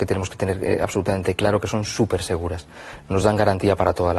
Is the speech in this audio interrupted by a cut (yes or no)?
no